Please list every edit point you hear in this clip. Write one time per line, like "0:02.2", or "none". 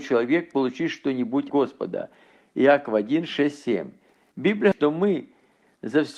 0:01.5
0:04.7

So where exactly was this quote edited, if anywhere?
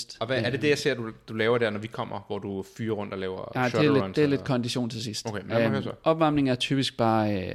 none

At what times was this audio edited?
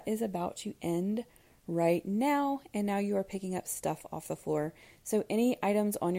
none

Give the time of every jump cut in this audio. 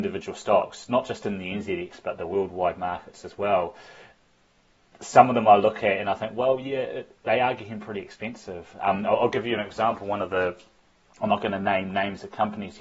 none

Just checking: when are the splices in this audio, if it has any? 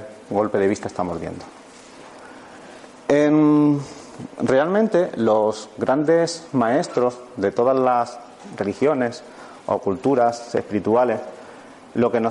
none

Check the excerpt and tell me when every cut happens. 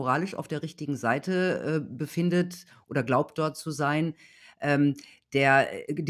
none

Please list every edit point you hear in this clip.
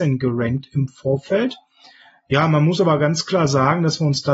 none

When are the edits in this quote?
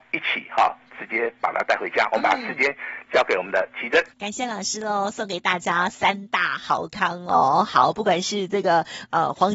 0:04.1

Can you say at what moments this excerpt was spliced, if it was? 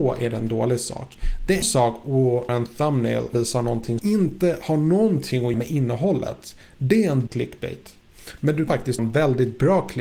0:01.6
0:02.5
0:03.3
0:04.0
0:05.5
0:07.3
0:08.7
0:09.0

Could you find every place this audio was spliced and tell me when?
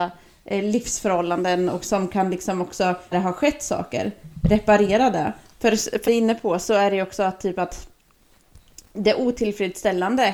0:03.1
0:06.1

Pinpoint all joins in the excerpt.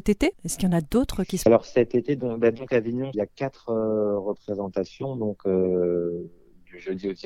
0:01.5
0:03.1

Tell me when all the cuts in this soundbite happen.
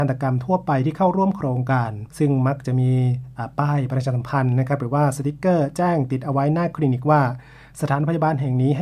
0:02.1

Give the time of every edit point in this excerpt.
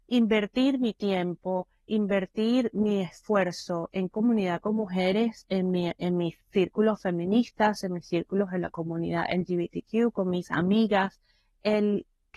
0:04.1

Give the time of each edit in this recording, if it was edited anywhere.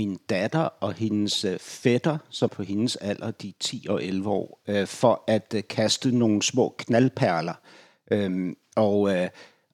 0:02.5

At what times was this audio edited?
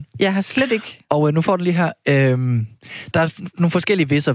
0:03.1

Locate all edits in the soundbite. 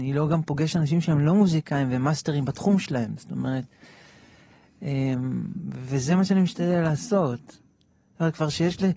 none

